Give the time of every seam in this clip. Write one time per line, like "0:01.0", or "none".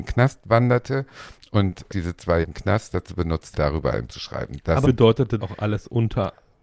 0:01.9
0:02.4
0:03.5
0:04.1
0:04.8
0:05.4